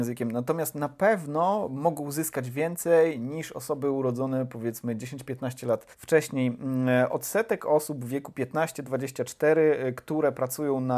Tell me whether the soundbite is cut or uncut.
cut